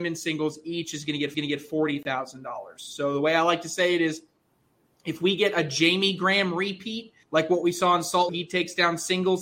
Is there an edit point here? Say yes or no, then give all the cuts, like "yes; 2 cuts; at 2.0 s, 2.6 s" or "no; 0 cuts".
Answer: yes; 3 cuts; at 1.3 s, 7.2 s, 8.3 s